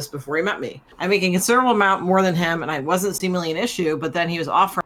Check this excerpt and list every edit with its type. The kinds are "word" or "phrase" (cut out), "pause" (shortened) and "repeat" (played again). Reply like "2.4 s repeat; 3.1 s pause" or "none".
0.9 s pause